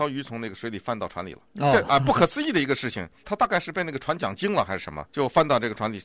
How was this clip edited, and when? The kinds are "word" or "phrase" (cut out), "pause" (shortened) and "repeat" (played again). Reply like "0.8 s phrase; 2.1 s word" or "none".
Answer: 1.5 s pause; 5.1 s pause